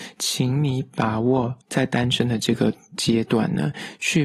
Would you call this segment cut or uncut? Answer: cut